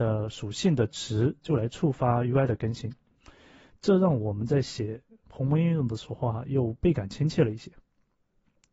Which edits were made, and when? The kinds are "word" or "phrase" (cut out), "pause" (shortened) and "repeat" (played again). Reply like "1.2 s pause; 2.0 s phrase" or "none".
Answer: none